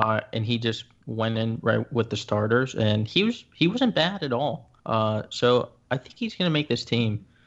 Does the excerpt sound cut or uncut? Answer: cut